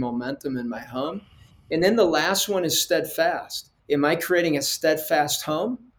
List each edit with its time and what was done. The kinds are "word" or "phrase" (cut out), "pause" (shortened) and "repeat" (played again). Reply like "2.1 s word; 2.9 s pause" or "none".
3.8 s pause